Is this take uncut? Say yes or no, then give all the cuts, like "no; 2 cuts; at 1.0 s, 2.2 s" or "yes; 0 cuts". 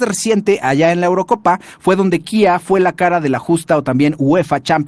yes; 0 cuts